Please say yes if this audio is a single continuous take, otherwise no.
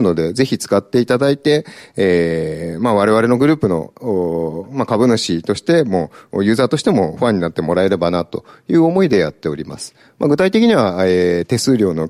yes